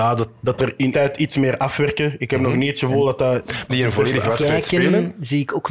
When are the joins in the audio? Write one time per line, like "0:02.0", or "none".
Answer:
0:00.9
0:03.7